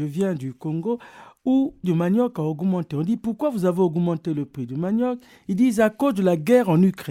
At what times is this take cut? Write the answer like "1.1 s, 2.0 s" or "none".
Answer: 1.8 s